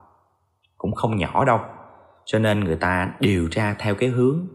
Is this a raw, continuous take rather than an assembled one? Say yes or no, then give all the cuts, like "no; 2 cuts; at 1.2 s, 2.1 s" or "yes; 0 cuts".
yes; 0 cuts